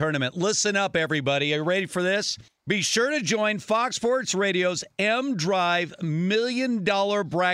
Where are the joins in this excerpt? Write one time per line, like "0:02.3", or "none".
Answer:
0:02.5